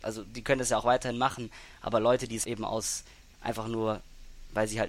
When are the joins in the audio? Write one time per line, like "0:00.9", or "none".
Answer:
0:02.4